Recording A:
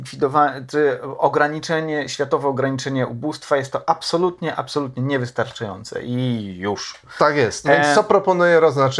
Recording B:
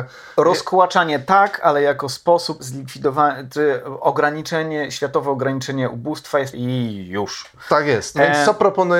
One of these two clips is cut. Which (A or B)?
B